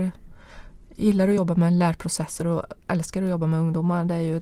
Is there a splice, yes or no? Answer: no